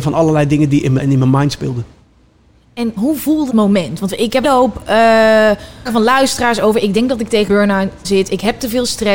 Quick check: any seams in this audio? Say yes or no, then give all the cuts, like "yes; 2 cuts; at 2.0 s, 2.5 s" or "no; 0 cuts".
yes; 7 cuts; at 1.0 s, 3.0 s, 3.5 s, 4.4 s, 5.9 s, 7.5 s, 8.0 s